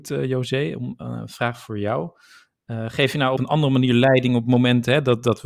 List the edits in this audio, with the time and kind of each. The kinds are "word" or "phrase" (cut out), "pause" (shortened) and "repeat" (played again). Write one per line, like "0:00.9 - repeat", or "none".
0:03.4 - phrase